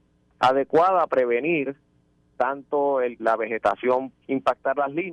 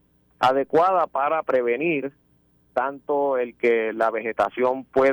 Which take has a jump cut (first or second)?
first